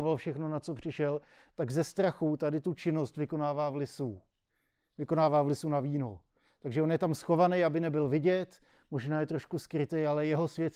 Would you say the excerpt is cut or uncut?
uncut